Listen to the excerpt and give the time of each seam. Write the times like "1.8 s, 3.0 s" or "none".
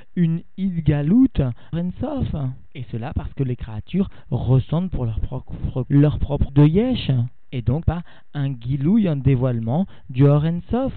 1.7 s, 5.8 s, 6.5 s, 7.8 s